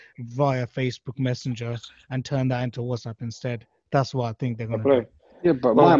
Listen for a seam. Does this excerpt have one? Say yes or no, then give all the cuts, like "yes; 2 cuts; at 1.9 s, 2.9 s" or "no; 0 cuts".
no; 0 cuts